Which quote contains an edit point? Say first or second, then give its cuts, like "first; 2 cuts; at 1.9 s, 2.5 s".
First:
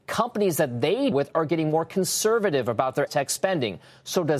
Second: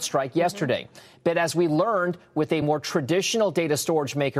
first; 2 cuts; at 1.1 s, 3.1 s